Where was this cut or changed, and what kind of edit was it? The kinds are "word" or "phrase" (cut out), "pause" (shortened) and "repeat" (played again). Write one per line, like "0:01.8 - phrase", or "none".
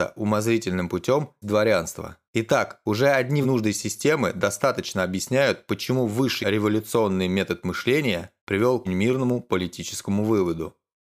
0:01.4 - word
0:02.3 - pause
0:03.4 - word
0:06.4 - word
0:08.4 - pause
0:08.9 - word